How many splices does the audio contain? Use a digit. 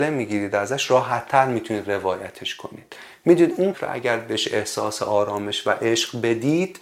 1